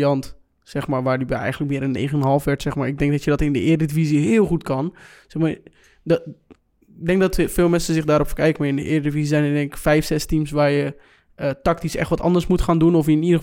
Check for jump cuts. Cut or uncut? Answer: uncut